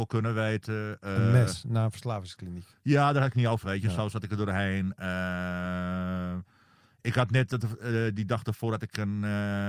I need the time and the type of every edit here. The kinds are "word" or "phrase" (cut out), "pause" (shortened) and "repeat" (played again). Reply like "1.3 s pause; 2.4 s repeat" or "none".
3.6 s word